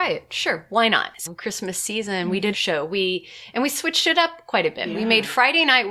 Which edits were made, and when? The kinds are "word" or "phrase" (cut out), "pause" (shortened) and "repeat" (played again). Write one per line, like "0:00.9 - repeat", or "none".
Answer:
0:01.3 - phrase
0:02.5 - phrase